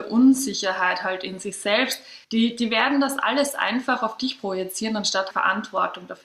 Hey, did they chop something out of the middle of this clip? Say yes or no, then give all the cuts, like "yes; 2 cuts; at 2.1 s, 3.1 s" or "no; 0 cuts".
yes; 2 cuts; at 2.2 s, 5.3 s